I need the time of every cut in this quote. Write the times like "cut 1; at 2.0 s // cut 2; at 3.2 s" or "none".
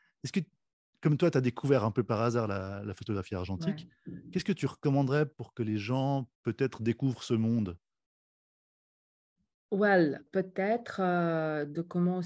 cut 1; at 6.3 s // cut 2; at 10.3 s